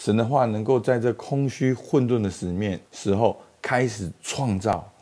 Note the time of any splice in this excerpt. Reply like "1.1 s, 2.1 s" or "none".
2.8 s